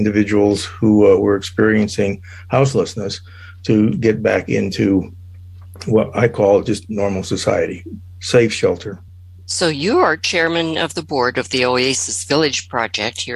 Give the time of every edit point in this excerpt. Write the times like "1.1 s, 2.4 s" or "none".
none